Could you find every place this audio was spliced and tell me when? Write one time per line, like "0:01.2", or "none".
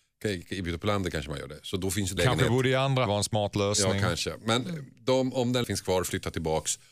0:02.2
0:03.1
0:05.6